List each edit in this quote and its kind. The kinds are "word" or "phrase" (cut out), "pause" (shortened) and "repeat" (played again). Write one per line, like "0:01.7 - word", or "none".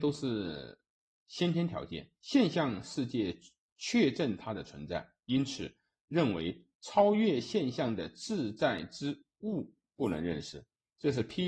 0:02.2 - pause